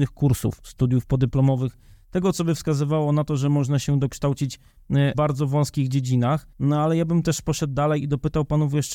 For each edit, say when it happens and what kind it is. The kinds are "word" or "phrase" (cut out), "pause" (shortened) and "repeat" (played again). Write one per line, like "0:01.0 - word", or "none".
0:05.1 - word
0:06.5 - pause